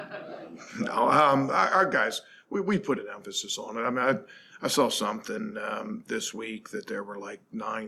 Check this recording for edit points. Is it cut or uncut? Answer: uncut